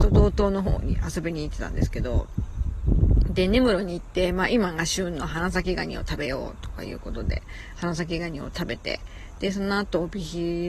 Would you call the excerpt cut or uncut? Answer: uncut